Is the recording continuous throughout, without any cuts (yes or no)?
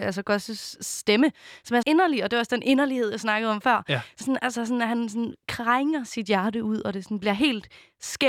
no